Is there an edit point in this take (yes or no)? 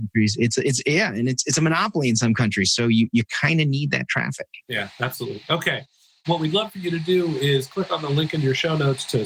no